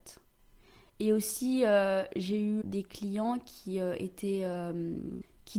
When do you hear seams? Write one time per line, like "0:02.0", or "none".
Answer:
0:02.6